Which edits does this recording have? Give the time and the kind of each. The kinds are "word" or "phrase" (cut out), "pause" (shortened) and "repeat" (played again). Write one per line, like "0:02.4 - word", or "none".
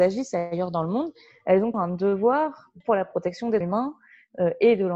0:01.7 - word
0:02.8 - word
0:03.6 - word